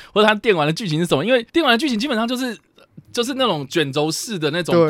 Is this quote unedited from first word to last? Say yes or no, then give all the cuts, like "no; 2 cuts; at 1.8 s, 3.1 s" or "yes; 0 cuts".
no; 2 cuts; at 1.5 s, 3.1 s